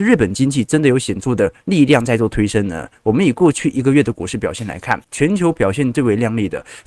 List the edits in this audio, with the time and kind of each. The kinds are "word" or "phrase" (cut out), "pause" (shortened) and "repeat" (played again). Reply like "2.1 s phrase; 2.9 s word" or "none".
5.0 s pause